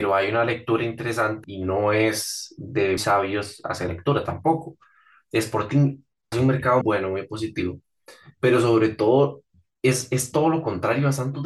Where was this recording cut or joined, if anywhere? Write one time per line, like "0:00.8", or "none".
0:01.4
0:03.0
0:03.9
0:06.3
0:06.8